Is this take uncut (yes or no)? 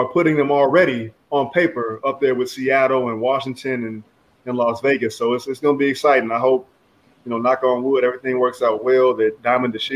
yes